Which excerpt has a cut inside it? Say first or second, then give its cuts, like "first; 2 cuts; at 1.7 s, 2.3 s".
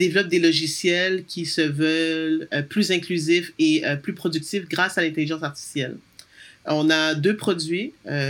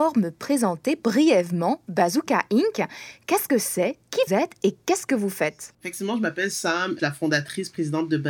second; 2 cuts; at 4.3 s, 7.0 s